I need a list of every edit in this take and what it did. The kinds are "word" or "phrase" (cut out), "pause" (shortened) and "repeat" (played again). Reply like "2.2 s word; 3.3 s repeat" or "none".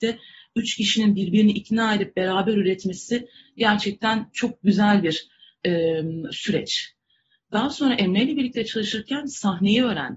none